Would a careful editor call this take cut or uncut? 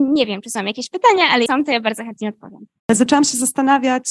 cut